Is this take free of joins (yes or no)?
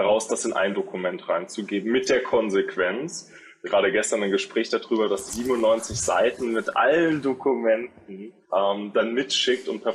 no